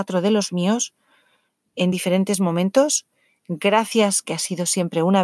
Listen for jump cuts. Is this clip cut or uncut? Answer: uncut